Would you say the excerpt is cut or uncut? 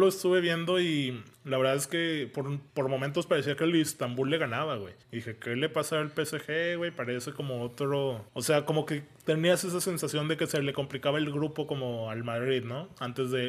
cut